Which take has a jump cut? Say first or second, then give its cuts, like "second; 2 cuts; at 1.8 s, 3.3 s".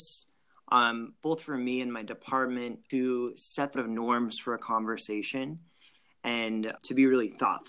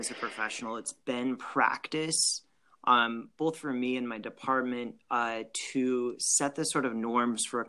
first; 3 cuts; at 2.9 s, 3.7 s, 6.8 s